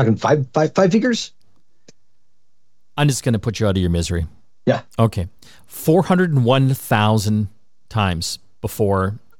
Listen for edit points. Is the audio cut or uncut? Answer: uncut